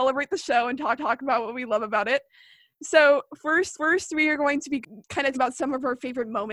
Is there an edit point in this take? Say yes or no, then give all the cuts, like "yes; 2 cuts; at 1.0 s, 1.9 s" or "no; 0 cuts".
yes; 4 cuts; at 1.0 s, 3.7 s, 5.0 s, 5.3 s